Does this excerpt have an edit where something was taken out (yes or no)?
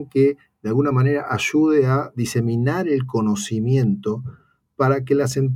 no